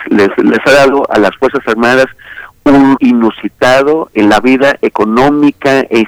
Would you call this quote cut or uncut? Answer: cut